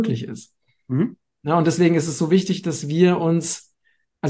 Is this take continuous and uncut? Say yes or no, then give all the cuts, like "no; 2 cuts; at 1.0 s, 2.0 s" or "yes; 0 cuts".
yes; 0 cuts